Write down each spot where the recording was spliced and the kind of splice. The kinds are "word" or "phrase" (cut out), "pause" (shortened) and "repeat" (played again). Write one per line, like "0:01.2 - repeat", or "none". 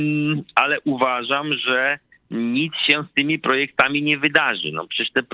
none